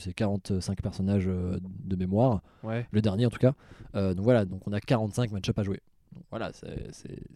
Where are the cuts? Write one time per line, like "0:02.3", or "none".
none